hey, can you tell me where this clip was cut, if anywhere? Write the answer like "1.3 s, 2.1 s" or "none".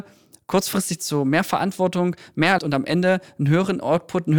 1.0 s, 2.6 s